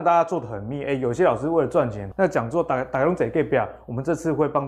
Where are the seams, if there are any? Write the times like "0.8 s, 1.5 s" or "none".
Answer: 2.1 s